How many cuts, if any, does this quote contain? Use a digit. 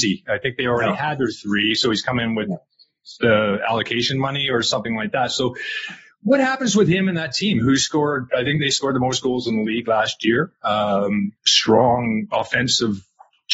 1